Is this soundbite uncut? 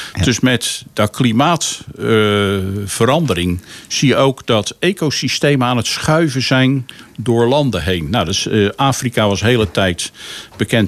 yes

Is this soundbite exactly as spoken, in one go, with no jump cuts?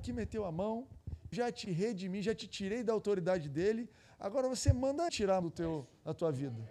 no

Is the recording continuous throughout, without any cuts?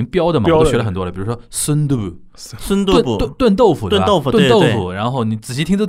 yes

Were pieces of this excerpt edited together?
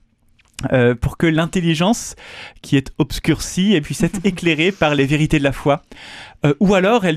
yes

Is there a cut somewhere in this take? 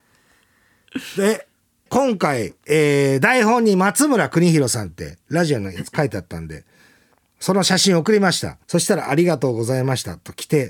yes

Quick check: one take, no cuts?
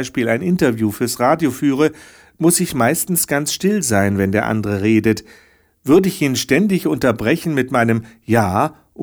yes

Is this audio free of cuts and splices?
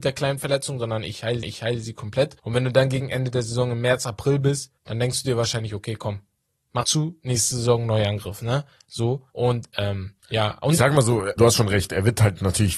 no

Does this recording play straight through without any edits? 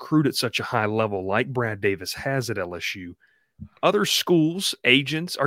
no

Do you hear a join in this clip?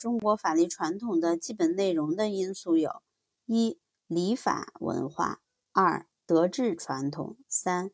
no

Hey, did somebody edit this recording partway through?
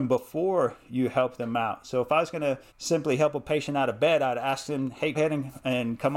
yes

